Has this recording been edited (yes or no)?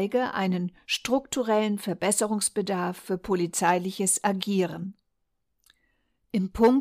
no